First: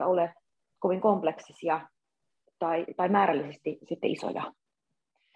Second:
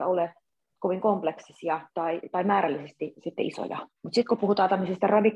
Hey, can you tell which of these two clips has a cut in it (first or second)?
second